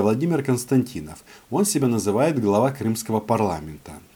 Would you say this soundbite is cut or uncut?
uncut